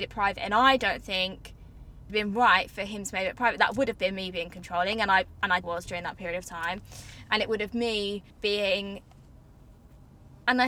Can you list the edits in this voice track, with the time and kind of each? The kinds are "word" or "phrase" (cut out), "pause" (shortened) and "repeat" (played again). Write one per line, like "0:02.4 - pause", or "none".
0:02.1 - phrase
0:05.6 - word
0:08.3 - pause

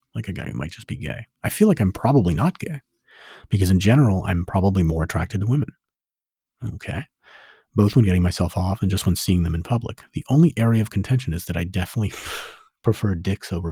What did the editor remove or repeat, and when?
none

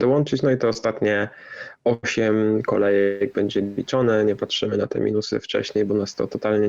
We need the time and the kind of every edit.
none

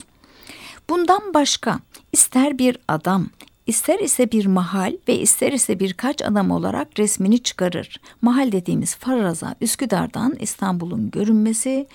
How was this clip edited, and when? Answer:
0:05.0 - pause

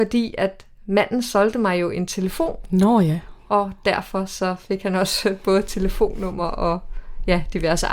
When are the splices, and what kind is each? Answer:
none

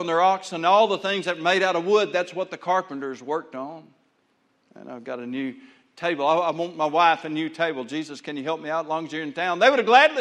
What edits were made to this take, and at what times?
none

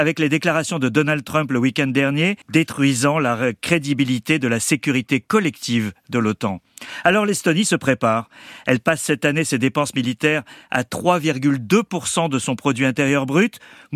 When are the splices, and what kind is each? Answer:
0:02.4 - pause

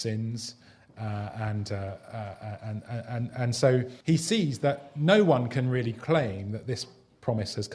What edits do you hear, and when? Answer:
0:04.0 - pause

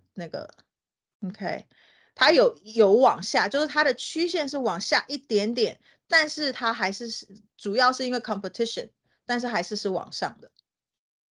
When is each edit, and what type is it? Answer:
none

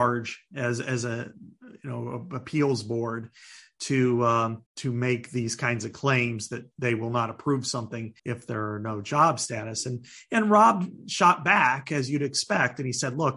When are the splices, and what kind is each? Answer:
0:04.7 - pause
0:06.7 - pause
0:08.2 - pause

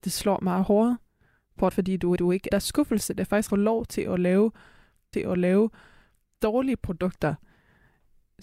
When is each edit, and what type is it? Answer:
0:01.7 - word
0:02.2 - repeat
0:02.5 - phrase
0:03.5 - phrase
0:05.1 - repeat

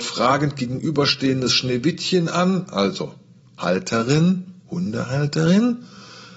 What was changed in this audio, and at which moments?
none

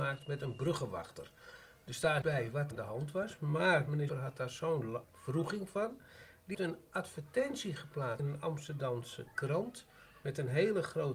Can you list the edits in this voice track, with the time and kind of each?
0:02.2 - word
0:02.7 - word
0:04.1 - word
0:05.0 - word
0:06.5 - word
0:08.2 - word

